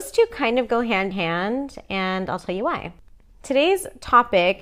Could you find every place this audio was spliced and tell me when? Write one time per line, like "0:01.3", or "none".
0:01.1